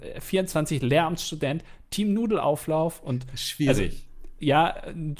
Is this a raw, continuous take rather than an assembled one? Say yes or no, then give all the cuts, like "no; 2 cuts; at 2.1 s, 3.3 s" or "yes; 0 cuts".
yes; 0 cuts